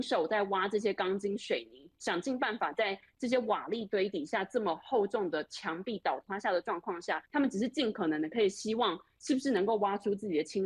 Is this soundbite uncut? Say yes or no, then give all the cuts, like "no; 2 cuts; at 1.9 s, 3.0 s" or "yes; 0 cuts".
no; 1 cut; at 7.3 s